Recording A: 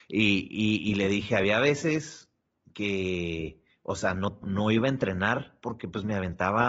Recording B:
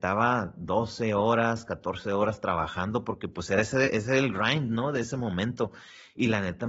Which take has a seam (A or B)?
A